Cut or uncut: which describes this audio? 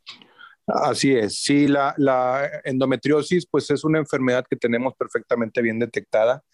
uncut